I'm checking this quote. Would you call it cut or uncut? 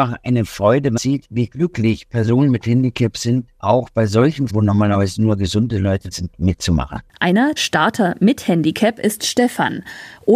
cut